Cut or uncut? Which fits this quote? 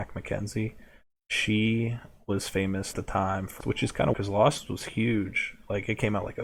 cut